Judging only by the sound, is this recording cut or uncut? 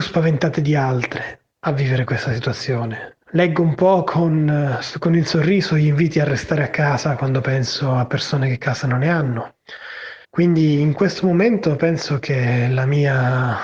cut